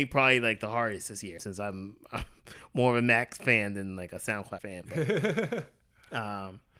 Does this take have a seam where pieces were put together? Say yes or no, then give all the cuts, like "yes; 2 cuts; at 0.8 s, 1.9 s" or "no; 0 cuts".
yes; 2 cuts; at 1.4 s, 4.6 s